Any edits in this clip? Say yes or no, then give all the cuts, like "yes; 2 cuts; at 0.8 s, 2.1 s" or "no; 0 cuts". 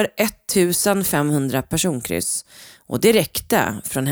no; 0 cuts